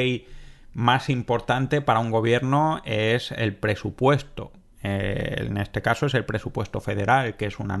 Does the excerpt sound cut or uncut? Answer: uncut